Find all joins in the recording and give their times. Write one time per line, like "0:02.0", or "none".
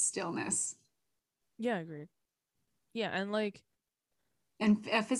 none